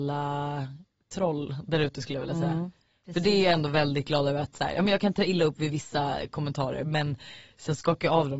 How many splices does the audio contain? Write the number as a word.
zero